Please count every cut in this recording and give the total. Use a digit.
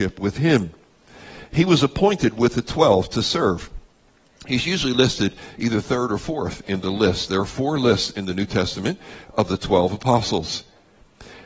0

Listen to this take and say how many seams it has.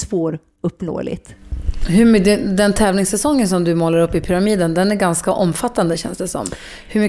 0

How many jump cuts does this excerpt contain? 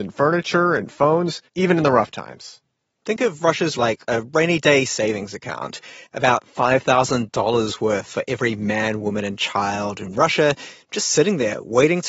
2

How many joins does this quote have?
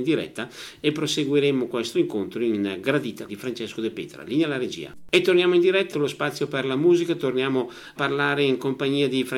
4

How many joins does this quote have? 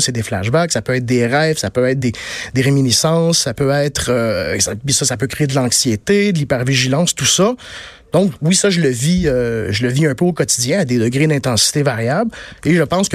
0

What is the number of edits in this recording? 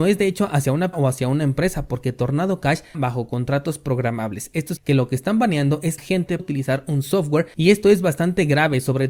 5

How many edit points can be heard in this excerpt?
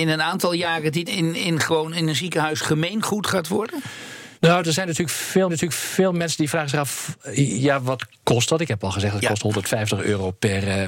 3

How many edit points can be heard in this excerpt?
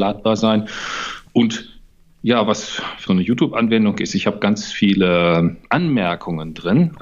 1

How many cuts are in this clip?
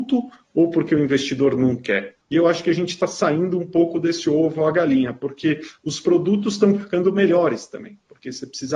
1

